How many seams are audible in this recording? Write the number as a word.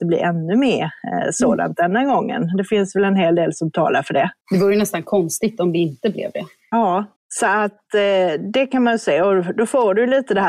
two